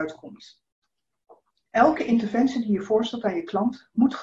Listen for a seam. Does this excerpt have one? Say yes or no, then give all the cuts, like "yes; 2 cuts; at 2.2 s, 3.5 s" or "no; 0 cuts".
no; 0 cuts